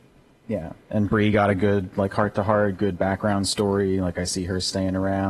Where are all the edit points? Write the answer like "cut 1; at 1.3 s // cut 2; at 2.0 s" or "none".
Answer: none

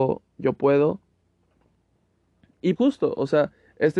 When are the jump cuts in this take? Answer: cut 1; at 2.8 s

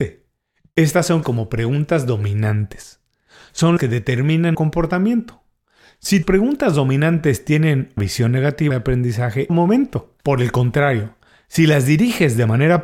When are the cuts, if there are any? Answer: cut 1; at 1.2 s // cut 2; at 3.8 s // cut 3; at 4.5 s // cut 4; at 6.2 s // cut 5; at 8.0 s // cut 6; at 8.7 s // cut 7; at 9.5 s // cut 8; at 10.2 s

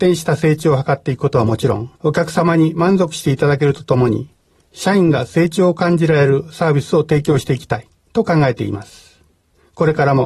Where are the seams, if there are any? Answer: cut 1; at 2.0 s // cut 2; at 8.0 s

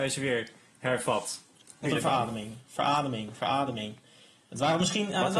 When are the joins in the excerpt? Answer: cut 1; at 1.8 s // cut 2; at 2.6 s

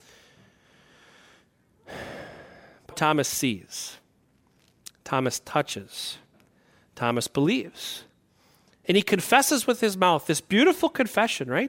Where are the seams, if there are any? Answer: cut 1; at 2.9 s

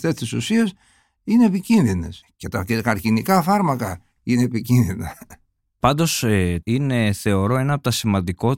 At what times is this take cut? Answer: cut 1; at 2.2 s // cut 2; at 6.6 s

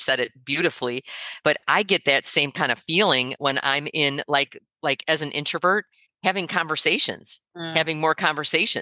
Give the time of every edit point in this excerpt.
none

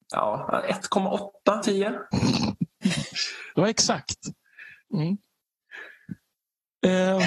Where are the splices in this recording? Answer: cut 1; at 1.6 s // cut 2; at 4.8 s

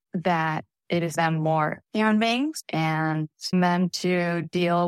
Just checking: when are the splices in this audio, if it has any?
cut 1; at 1.2 s // cut 2; at 1.8 s // cut 3; at 3.5 s

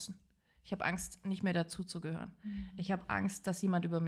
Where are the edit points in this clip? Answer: none

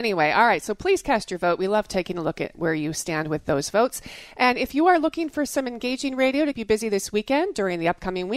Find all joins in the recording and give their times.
cut 1; at 6.5 s

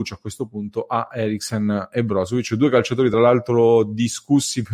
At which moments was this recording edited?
none

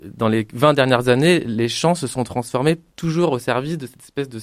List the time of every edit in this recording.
none

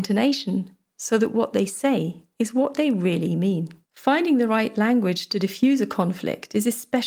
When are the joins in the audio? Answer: cut 1; at 3.8 s

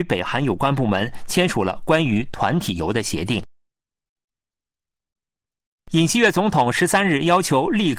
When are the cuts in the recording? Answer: none

